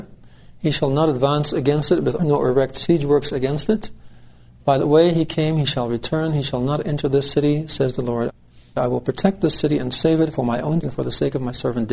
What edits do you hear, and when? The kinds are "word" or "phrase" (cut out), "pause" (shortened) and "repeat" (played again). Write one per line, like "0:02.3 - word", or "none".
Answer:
0:02.2 - word
0:10.8 - word